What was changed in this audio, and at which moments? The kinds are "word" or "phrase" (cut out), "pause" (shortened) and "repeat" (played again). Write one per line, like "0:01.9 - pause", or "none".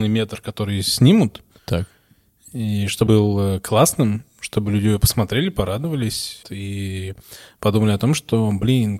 0:01.5 - pause
0:03.1 - word
0:06.4 - word